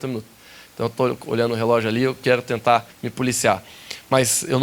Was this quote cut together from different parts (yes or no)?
yes